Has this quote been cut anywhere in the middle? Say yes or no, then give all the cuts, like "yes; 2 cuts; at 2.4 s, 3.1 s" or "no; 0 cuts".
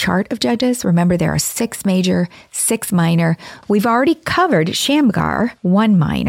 no; 0 cuts